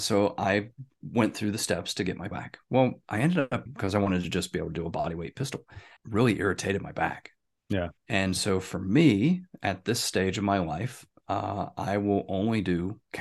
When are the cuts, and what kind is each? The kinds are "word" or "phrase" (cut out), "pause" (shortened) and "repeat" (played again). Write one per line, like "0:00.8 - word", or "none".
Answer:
0:02.3 - word
0:03.7 - word
0:06.0 - pause
0:08.0 - pause